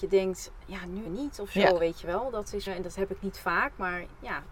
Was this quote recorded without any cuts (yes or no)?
no